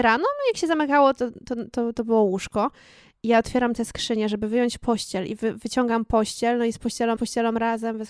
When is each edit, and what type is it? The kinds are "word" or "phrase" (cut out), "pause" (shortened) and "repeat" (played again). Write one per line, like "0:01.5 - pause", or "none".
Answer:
0:07.2 - repeat